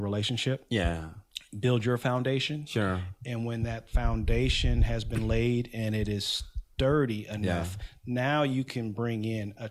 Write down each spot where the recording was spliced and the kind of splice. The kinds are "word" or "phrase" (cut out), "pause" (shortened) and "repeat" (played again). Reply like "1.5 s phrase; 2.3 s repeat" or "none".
none